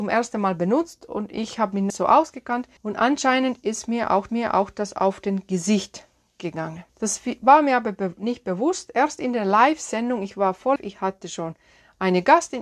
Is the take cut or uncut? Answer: cut